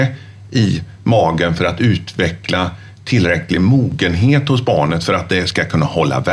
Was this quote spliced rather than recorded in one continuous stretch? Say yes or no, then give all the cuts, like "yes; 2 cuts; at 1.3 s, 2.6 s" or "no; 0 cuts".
no; 0 cuts